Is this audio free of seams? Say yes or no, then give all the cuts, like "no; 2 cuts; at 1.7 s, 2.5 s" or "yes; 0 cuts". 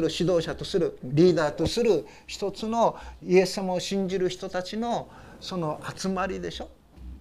no; 1 cut; at 1.0 s